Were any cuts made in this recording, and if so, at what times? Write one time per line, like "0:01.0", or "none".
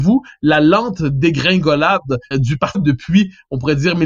0:02.3
0:02.7